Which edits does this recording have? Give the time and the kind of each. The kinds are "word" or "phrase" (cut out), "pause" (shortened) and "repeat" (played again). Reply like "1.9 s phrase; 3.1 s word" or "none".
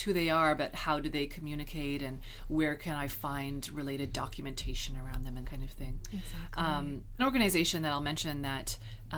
5.4 s word; 7.2 s word